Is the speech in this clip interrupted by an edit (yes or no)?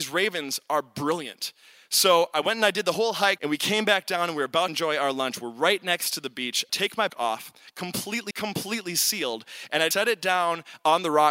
yes